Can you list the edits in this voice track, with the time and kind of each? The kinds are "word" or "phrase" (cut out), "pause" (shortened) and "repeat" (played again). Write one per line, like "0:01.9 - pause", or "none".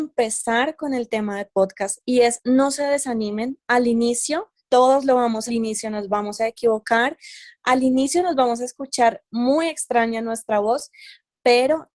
0:04.6 - pause
0:05.5 - phrase